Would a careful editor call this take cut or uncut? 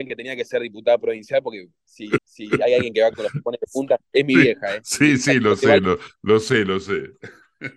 cut